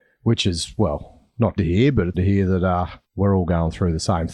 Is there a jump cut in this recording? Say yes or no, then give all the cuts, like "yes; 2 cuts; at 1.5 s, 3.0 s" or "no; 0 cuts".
yes; 3 cuts; at 1.6 s, 2.1 s, 3.0 s